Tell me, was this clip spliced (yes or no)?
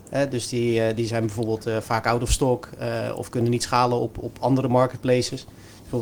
no